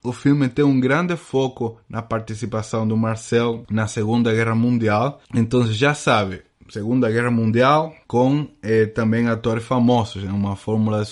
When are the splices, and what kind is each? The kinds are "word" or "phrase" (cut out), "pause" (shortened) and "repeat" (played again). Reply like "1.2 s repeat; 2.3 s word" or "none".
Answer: none